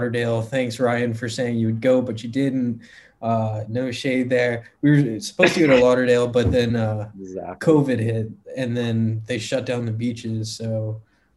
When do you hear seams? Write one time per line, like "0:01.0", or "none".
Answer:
none